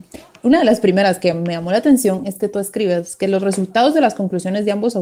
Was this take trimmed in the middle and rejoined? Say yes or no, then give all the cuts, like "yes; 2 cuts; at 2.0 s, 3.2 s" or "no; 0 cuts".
no; 0 cuts